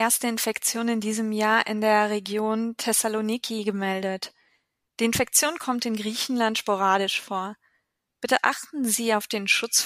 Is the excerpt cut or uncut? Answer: uncut